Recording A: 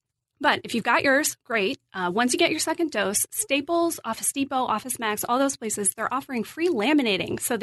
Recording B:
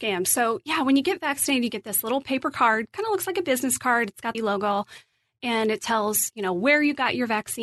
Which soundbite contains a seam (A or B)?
B